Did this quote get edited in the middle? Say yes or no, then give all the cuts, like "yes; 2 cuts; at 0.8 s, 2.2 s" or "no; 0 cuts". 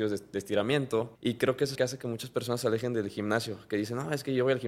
yes; 2 cuts; at 1.2 s, 1.7 s